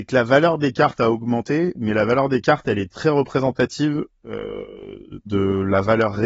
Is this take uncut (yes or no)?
yes